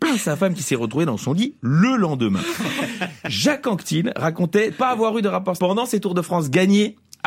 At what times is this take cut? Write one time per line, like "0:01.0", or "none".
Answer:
0:04.7
0:05.6